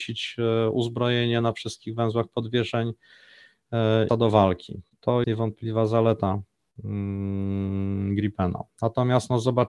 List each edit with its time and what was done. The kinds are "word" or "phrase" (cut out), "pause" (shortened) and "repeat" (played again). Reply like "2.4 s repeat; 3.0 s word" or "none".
4.1 s phrase; 5.2 s word